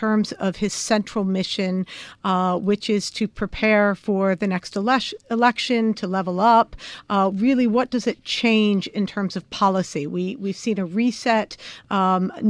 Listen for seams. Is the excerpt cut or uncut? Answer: uncut